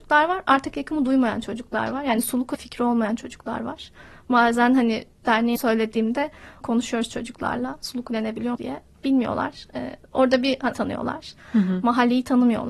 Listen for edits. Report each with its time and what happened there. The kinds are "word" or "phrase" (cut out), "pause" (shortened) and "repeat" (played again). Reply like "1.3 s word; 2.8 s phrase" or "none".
2.5 s word; 5.6 s word; 6.6 s word; 8.5 s word; 10.7 s word